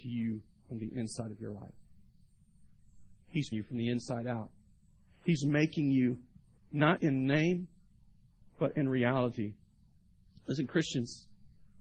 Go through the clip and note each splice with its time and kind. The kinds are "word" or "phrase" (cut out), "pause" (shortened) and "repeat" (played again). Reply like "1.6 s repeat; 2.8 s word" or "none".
3.5 s word; 6.6 s word; 7.0 s word